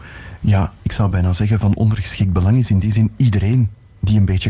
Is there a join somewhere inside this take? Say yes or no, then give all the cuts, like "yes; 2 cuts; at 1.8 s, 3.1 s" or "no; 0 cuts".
no; 0 cuts